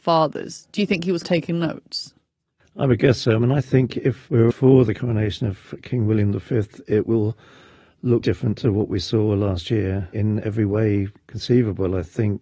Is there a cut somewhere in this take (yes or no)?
yes